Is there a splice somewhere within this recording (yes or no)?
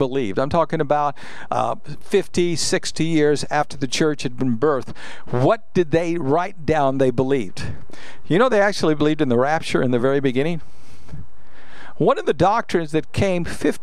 no